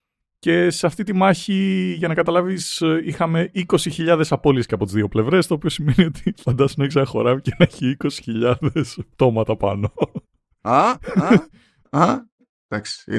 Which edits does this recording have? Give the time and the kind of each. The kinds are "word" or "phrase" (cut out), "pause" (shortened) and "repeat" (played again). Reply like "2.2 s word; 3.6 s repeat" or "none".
none

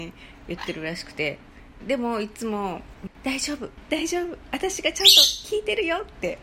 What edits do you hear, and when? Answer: 1.8 s phrase

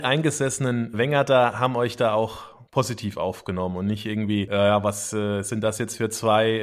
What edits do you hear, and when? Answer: 0.9 s word

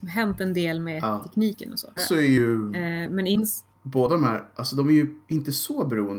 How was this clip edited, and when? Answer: 2.0 s word; 5.2 s pause

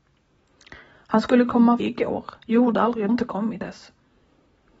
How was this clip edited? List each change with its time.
1.8 s word; 2.4 s pause; 3.1 s phrase; 3.6 s word

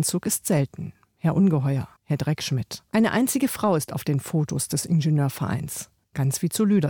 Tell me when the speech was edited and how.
2.0 s pause; 2.9 s pause

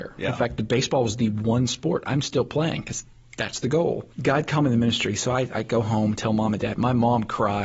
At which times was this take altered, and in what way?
4.1 s pause

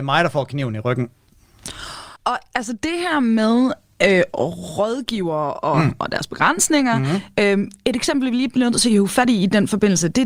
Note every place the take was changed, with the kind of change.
2.2 s pause

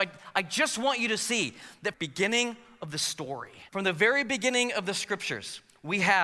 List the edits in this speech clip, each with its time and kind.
1.9 s phrase; 3.7 s pause

